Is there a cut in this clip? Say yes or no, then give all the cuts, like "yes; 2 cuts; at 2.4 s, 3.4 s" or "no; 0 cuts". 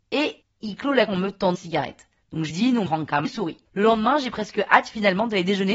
yes; 6 cuts; at 1.1 s, 1.5 s, 2.5 s, 2.9 s, 3.2 s, 3.6 s